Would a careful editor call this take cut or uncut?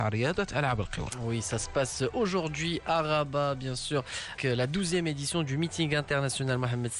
cut